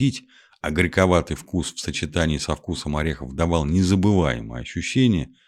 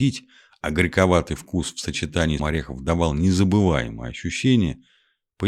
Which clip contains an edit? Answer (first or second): second